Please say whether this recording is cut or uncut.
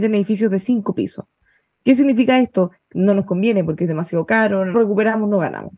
cut